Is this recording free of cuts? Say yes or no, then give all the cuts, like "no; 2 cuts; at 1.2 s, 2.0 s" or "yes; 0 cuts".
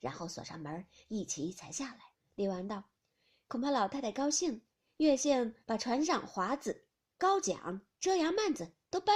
no; 2 cuts; at 2.1 s, 5.6 s